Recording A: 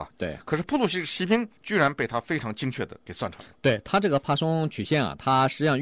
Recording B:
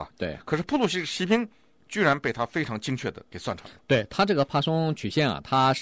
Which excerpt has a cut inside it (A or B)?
A